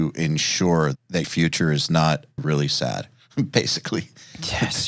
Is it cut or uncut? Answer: cut